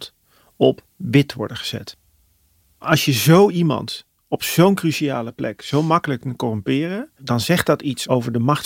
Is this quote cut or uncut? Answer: uncut